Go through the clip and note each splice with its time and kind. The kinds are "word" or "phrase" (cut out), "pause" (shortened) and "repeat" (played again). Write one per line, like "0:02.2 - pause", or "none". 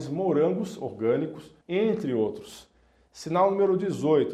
0:01.6 - pause